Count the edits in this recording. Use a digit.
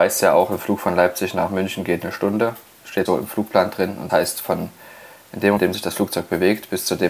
3